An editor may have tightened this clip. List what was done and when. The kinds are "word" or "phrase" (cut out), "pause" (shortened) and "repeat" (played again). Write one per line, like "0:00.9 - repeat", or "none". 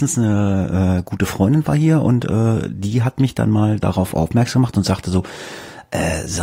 none